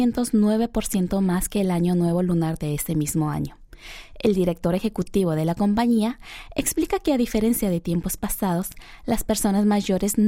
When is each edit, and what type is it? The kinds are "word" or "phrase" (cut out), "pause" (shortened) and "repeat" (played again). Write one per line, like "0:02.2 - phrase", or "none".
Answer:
none